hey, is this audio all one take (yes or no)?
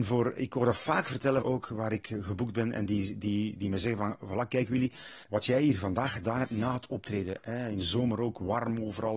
no